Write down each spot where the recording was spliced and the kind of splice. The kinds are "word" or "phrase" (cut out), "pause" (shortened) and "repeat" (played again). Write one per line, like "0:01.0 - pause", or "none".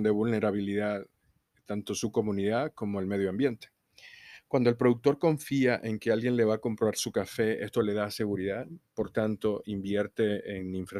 none